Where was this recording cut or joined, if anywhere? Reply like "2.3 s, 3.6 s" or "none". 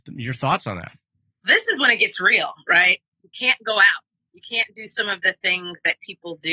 1.4 s, 4.3 s

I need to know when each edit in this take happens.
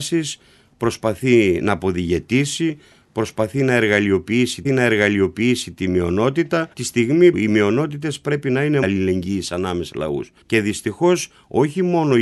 4.6 s, 6.7 s, 7.3 s, 8.8 s, 9.9 s, 10.4 s

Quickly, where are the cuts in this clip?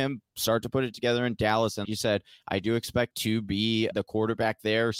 1.8 s, 3.1 s, 3.9 s

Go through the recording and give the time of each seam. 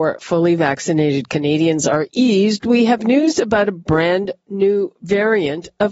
none

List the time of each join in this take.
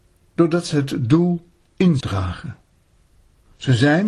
2.0 s

